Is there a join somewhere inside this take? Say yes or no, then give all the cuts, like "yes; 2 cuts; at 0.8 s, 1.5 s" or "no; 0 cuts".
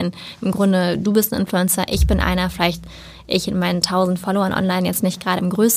no; 0 cuts